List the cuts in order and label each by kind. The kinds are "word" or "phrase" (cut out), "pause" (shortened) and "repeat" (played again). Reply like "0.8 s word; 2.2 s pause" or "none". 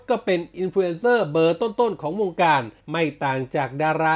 2.8 s pause